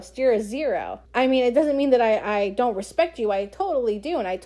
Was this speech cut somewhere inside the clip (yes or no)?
yes